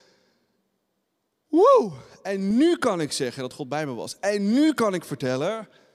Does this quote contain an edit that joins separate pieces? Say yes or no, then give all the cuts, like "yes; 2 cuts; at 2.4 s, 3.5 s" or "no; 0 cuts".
no; 0 cuts